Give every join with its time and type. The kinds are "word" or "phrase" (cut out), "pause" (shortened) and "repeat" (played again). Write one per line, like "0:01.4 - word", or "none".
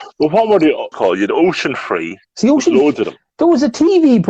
0:00.9 - phrase
0:02.2 - pause